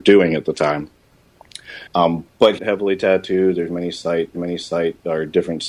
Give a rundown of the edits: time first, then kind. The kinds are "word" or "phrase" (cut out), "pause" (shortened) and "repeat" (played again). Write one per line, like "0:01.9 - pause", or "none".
0:01.9 - pause
0:02.6 - phrase
0:04.3 - repeat